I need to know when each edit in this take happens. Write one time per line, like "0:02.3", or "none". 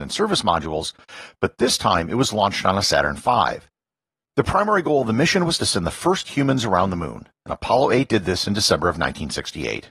none